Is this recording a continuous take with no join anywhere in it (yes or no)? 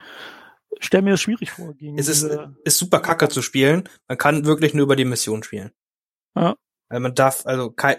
yes